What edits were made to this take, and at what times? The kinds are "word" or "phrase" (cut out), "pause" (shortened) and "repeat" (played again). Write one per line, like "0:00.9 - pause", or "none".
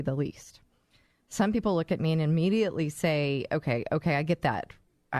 none